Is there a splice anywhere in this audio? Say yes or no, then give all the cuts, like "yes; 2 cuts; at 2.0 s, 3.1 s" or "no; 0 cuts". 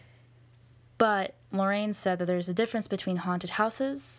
yes; 1 cut; at 1.4 s